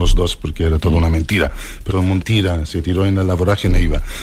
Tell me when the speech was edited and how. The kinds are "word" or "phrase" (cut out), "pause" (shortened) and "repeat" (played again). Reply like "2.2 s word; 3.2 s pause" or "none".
1.9 s word; 2.2 s word